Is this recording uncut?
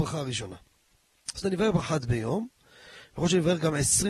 no; 2 cuts; at 1.4 s, 1.8 s

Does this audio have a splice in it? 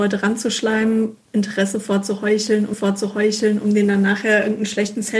yes; 1 cut; at 2.7 s

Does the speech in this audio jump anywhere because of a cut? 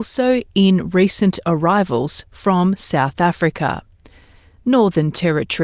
no; 0 cuts

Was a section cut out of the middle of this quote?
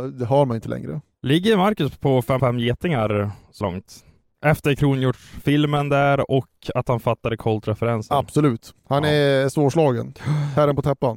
yes; 3 cuts; at 2.4 s, 3.6 s, 8.8 s

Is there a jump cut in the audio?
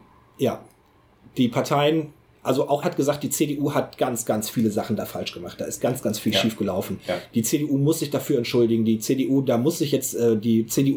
yes; 1 cut; at 2.8 s

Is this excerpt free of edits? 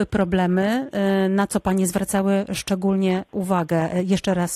yes; 0 cuts

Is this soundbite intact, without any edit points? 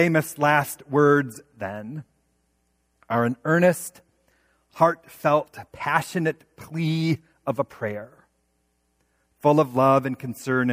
yes; 0 cuts

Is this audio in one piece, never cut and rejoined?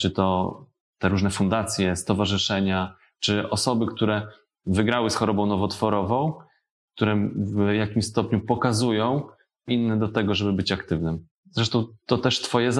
no; 1 cut; at 9.7 s

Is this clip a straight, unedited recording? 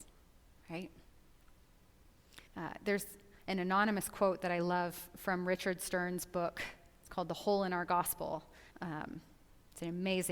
no; 3 cuts; at 2.5 s, 3.4 s, 8.7 s

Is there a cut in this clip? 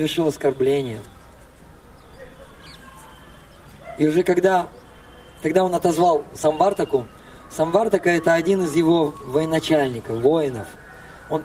no; 0 cuts

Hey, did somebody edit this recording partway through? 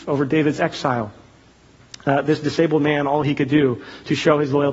no; 0 cuts

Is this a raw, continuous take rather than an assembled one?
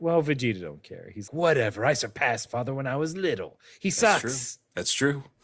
no; 2 cuts; at 1.3 s, 2.5 s

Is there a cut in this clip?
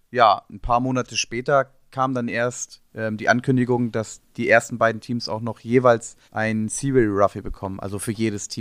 yes; 3 cuts; at 2.9 s, 4.3 s, 6.3 s

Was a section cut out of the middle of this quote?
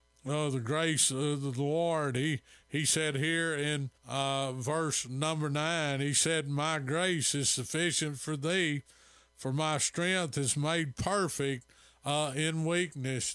yes; 1 cut; at 4.0 s

